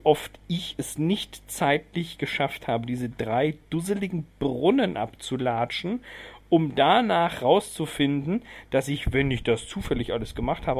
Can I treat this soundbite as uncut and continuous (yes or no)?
yes